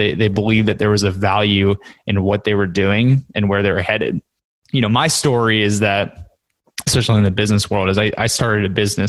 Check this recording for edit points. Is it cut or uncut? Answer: uncut